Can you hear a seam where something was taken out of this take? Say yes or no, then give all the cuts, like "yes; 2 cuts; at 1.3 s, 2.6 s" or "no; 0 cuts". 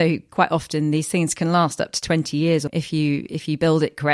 yes; 1 cut; at 2.7 s